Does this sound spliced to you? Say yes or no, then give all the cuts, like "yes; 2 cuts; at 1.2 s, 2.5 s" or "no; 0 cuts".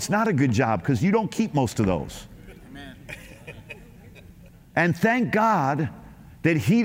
no; 0 cuts